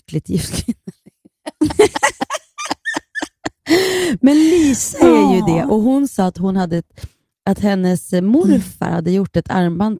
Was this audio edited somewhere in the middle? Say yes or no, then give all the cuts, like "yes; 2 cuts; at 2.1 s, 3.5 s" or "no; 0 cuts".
no; 0 cuts